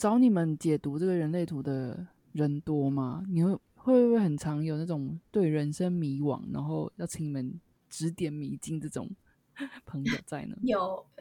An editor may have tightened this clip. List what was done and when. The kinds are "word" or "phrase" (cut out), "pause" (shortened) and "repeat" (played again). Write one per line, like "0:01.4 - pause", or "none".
none